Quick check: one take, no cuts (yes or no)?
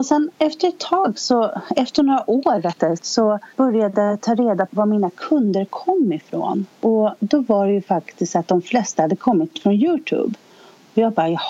no